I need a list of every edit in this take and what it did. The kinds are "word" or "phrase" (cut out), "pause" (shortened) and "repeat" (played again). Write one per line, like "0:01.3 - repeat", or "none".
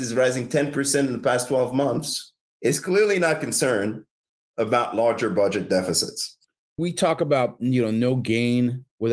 none